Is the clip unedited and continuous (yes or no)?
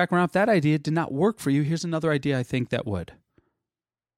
yes